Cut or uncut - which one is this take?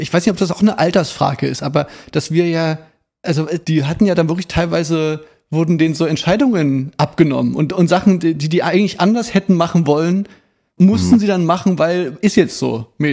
uncut